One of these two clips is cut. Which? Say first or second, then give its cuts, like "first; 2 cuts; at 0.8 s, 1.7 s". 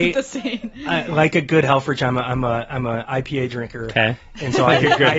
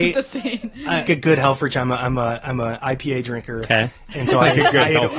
second; 1 cut; at 1.0 s